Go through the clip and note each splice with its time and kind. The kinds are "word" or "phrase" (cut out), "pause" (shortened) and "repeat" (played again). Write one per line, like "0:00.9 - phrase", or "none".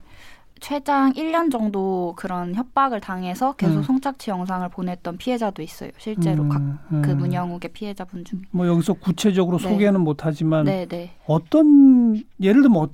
0:11.2 - pause